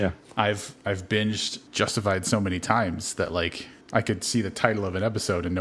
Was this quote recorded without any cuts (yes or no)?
no